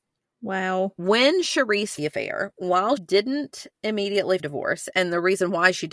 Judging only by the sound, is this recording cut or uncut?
cut